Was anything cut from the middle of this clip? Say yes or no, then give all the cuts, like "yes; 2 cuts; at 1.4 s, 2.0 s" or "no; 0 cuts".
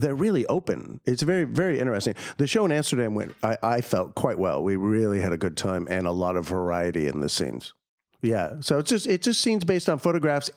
no; 0 cuts